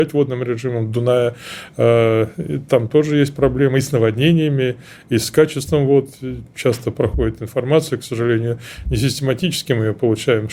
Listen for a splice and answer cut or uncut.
uncut